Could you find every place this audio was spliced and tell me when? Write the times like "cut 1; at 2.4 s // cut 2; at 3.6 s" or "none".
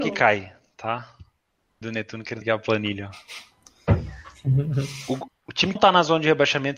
cut 1; at 1.8 s // cut 2; at 2.4 s // cut 3; at 5.3 s // cut 4; at 5.8 s